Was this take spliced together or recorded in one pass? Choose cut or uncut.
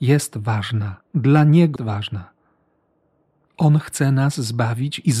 cut